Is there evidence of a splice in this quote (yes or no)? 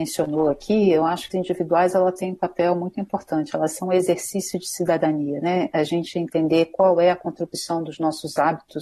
yes